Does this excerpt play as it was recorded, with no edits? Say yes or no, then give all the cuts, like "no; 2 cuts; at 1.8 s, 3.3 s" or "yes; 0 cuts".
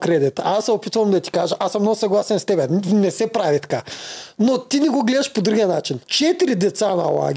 no; 1 cut; at 6.0 s